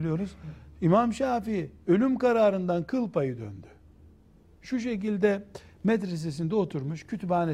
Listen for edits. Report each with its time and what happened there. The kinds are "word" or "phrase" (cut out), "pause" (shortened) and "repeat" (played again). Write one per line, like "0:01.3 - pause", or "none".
0:03.9 - pause